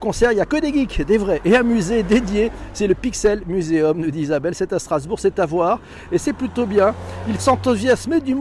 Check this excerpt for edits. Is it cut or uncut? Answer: cut